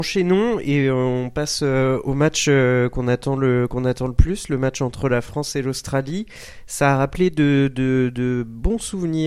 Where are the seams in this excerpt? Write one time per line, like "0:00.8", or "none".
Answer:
none